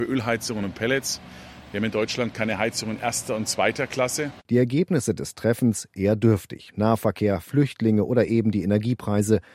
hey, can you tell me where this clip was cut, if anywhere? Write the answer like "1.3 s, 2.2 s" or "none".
none